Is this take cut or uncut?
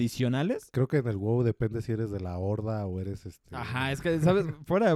uncut